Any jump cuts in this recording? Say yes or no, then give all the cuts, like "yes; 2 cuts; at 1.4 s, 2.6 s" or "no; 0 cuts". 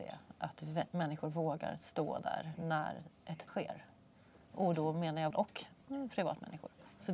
yes; 2 cuts; at 3.5 s, 5.3 s